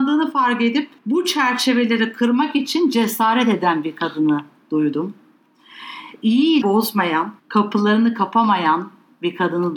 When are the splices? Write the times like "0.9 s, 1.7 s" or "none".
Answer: 1.0 s, 6.6 s, 7.4 s

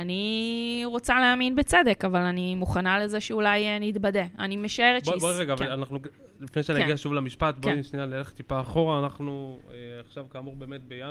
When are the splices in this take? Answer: none

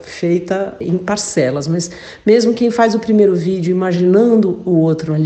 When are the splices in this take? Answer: none

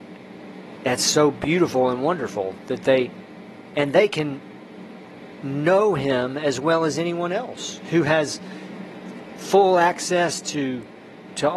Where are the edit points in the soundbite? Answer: none

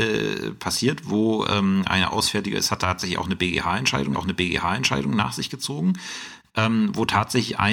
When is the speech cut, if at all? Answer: 4.1 s

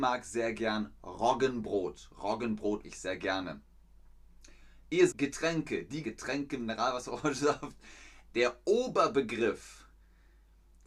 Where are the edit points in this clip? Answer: 2.8 s, 5.1 s, 6.0 s

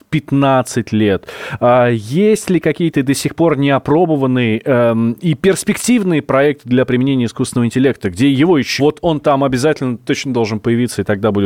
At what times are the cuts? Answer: 8.8 s

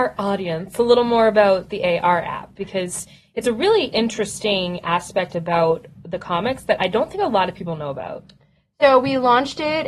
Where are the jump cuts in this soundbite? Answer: none

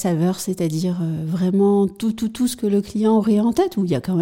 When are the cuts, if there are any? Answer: none

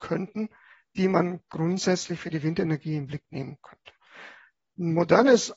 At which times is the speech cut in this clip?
none

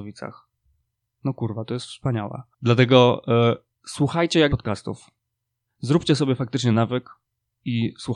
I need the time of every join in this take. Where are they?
2.5 s, 4.5 s

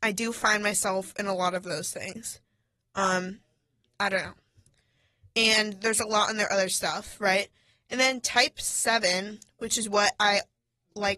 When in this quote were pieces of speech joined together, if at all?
none

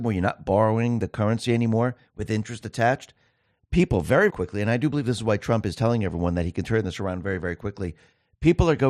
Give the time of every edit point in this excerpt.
4.3 s

